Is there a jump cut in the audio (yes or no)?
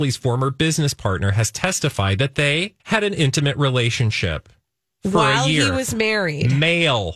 yes